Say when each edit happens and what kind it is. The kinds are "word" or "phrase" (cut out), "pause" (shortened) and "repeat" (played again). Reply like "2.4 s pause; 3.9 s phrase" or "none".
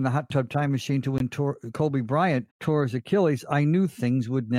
2.5 s pause